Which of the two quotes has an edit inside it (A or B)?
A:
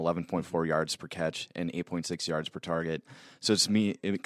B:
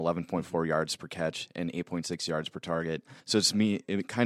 B